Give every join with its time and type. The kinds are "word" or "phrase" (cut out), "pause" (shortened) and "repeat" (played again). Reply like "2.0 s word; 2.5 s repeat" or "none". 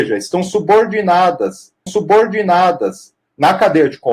1.9 s repeat

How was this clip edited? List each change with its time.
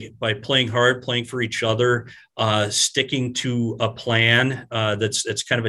none

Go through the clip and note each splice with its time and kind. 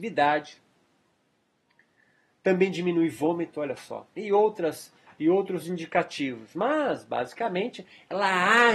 none

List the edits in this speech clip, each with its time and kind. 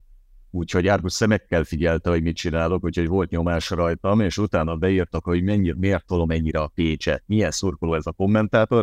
none

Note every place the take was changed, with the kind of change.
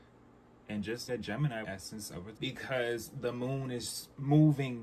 1.1 s word; 1.6 s phrase; 2.3 s word

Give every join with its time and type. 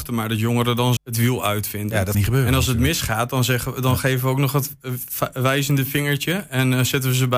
1.0 s word; 2.1 s word

